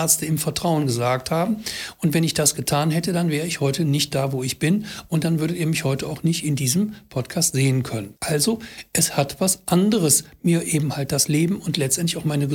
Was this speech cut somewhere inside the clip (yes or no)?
yes